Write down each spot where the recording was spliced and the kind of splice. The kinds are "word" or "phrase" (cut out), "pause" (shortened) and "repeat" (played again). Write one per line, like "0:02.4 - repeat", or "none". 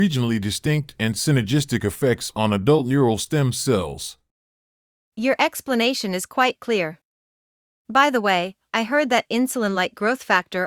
none